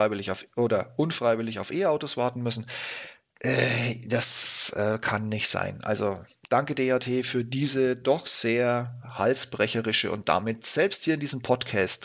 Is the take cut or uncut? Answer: uncut